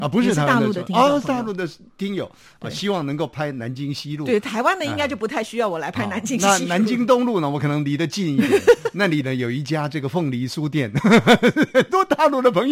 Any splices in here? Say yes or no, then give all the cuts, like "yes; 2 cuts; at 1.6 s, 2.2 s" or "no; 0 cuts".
no; 0 cuts